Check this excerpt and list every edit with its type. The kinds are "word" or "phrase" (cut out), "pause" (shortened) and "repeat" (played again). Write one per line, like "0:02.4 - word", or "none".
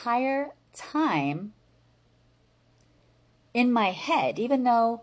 none